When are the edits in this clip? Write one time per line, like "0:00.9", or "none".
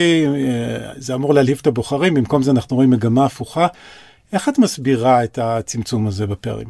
none